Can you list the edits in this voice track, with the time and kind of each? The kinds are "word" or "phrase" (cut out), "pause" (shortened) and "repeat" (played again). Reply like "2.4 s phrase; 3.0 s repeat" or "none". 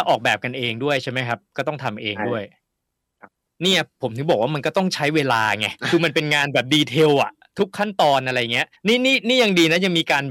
5.8 s pause; 8.8 s pause